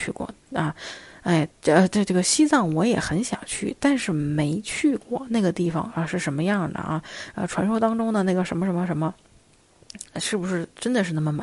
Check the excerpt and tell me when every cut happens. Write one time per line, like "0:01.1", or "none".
0:01.5